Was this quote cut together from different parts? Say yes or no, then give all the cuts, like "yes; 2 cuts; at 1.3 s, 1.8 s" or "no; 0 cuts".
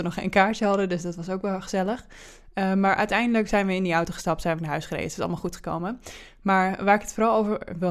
yes; 1 cut; at 4.6 s